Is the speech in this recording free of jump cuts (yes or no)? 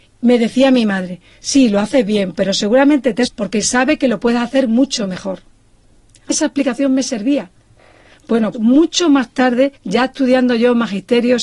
no